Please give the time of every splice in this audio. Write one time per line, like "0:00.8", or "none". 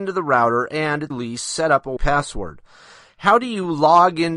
0:01.1
0:02.0